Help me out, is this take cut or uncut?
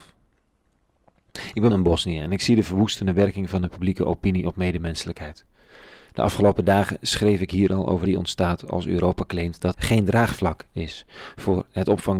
cut